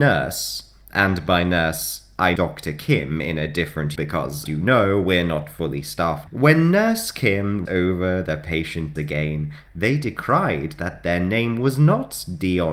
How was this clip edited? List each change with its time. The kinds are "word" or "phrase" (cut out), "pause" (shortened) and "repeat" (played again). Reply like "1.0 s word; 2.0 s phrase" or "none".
2.4 s word; 4.0 s word; 4.5 s word; 6.3 s word; 7.7 s word; 9.0 s word